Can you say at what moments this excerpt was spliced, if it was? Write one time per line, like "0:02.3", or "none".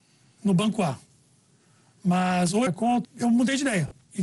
0:02.7
0:03.0